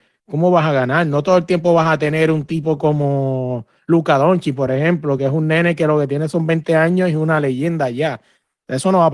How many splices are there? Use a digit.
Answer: 0